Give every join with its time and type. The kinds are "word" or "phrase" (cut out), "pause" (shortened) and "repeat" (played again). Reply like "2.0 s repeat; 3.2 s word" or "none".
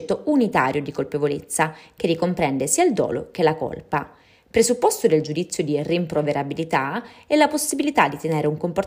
none

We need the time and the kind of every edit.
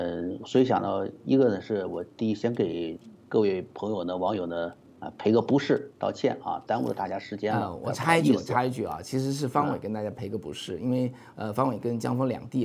none

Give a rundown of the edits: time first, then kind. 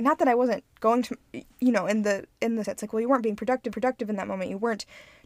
1.5 s pause; 2.6 s phrase; 3.7 s repeat

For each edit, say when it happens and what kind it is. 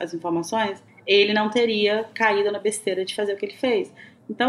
none

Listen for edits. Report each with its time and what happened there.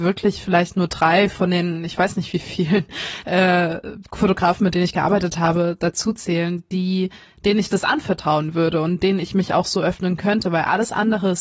none

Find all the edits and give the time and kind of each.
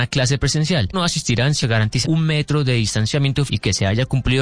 0.9 s word; 1.6 s word; 2.0 s word; 3.5 s word

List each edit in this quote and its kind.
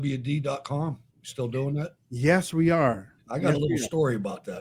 1.1 s pause

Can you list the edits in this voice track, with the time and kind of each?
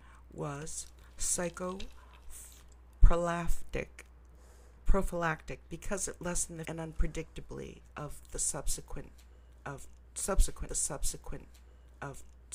6.6 s word; 10.7 s repeat

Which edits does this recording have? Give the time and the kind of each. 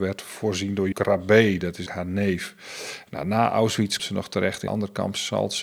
0.9 s word; 1.9 s word; 4.0 s word; 4.7 s word

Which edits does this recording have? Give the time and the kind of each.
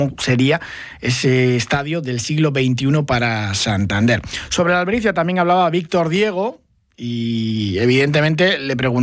none

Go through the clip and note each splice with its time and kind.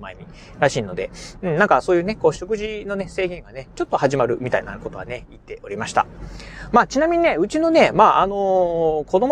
none

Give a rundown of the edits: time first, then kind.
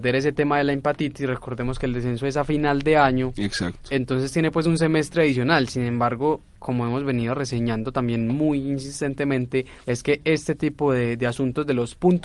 9.8 s pause

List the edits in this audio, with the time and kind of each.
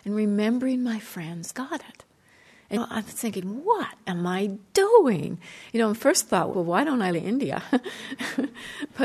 1.5 s word; 2.8 s word; 6.5 s word; 7.1 s phrase

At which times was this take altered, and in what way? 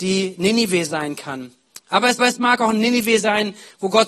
2.2 s repeat

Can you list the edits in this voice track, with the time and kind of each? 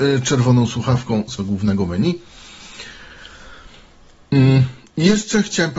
1.4 s word

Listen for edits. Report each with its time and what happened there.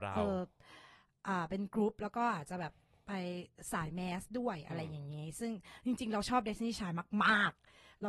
none

